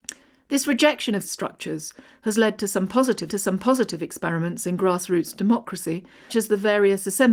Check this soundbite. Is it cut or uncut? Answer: cut